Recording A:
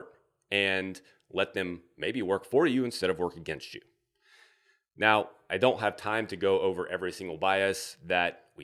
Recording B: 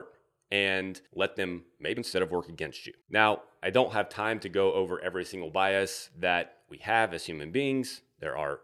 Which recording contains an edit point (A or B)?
B